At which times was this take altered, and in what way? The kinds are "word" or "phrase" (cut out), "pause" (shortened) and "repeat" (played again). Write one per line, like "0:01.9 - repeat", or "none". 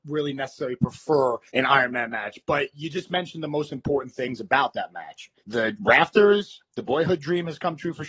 0:01.5 - pause
0:05.4 - pause